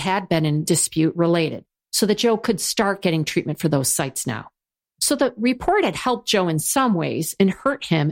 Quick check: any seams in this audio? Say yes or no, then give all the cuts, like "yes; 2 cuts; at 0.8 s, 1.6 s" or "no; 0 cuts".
no; 0 cuts